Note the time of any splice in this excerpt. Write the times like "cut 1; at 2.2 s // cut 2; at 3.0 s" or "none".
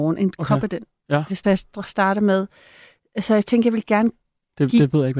cut 1; at 1.4 s